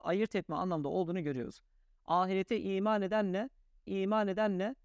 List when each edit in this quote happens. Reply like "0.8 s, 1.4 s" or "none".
3.9 s